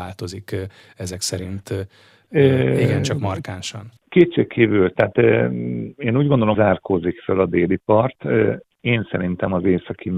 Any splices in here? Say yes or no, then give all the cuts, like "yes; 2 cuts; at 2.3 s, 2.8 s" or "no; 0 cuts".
yes; 2 cuts; at 4.0 s, 6.5 s